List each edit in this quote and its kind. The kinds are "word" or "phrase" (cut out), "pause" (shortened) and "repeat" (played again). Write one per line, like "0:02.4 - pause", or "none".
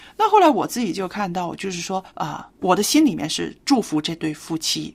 0:02.1 - pause